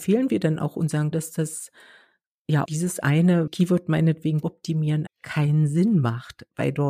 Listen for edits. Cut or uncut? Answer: cut